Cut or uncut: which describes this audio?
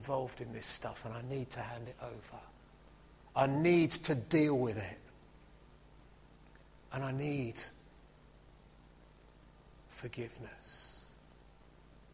uncut